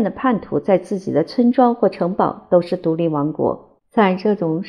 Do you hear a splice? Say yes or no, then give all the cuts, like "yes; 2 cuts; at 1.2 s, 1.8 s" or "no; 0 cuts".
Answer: yes; 1 cut; at 3.8 s